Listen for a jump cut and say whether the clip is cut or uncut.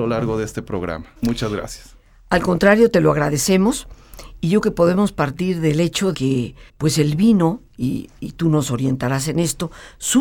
cut